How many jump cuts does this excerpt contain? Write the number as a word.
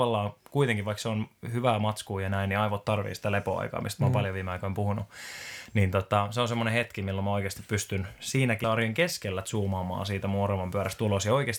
one